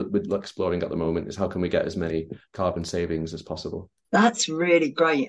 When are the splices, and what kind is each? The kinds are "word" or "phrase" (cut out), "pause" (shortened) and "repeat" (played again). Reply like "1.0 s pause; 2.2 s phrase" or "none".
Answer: 4.0 s pause